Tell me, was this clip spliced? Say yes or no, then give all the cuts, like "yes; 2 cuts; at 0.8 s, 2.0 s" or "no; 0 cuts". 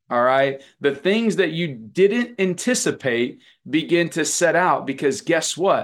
no; 0 cuts